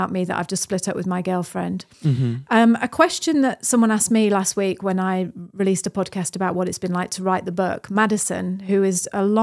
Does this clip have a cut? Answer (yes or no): yes